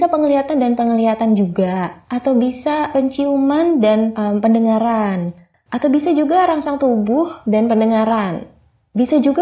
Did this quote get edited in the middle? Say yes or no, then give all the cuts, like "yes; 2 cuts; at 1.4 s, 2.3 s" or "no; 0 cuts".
no; 0 cuts